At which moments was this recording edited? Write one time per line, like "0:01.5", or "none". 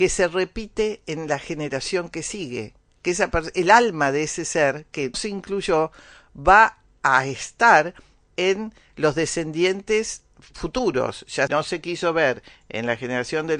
0:05.1
0:11.5